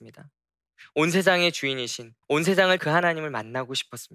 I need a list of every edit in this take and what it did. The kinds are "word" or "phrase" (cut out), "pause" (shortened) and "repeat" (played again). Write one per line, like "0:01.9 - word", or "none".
0:02.2 - pause
0:02.8 - word

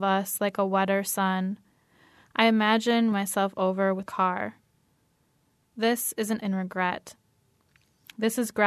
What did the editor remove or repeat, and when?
0:03.1 - word
0:04.1 - word
0:06.4 - word

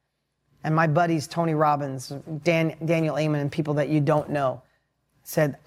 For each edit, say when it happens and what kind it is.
none

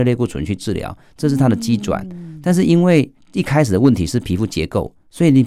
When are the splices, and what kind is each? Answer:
0:03.2 - pause

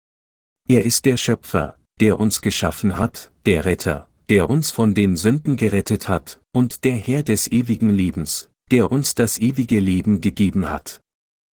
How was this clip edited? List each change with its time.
none

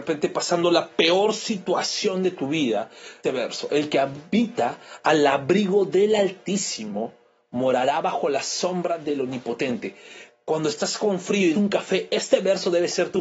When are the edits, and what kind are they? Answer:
0:03.2 - phrase
0:11.5 - word

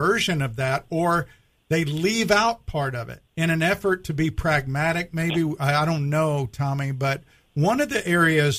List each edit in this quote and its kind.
0:03.3 - pause

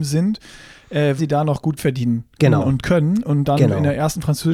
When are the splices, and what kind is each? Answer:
0:01.2 - word
0:01.8 - word
0:02.4 - word
0:03.2 - word

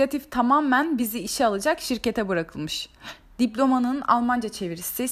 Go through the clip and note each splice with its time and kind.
none

